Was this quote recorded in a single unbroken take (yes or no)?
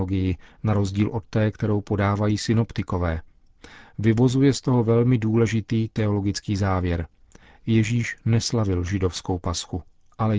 yes